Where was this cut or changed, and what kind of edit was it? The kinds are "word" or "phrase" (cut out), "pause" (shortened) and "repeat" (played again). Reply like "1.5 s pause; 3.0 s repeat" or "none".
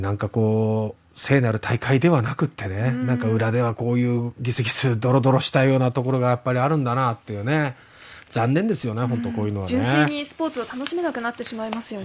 none

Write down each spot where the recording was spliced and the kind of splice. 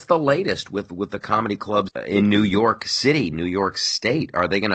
1.9 s word

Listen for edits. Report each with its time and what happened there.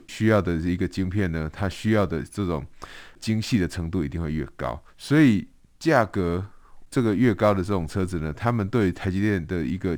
4.9 s pause

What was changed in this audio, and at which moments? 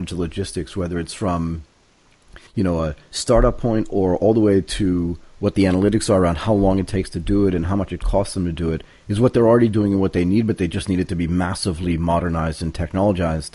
2.5 s pause

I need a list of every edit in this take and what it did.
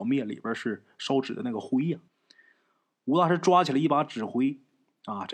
2.1 s pause

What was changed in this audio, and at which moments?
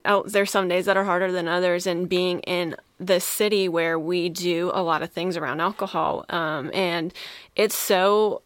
none

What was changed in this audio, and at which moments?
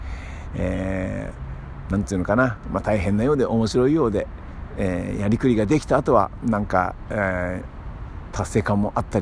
none

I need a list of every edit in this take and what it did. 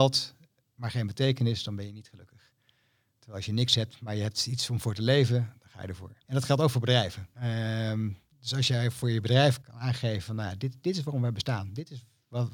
6.2 s pause; 7.3 s pause; 9.6 s word

